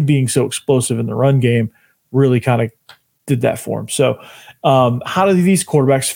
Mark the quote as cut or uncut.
uncut